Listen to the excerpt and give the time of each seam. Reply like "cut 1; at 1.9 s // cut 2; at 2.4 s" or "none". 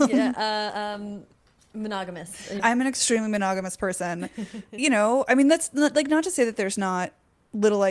cut 1; at 2.6 s